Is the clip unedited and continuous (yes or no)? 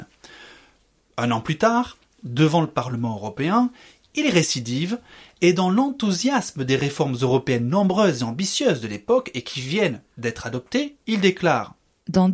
yes